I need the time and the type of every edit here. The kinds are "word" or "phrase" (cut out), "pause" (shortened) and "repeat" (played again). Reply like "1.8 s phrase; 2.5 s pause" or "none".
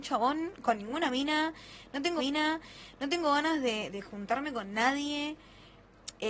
2.2 s repeat; 3.9 s word